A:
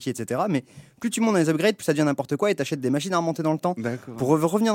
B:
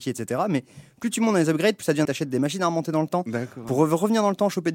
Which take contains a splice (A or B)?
B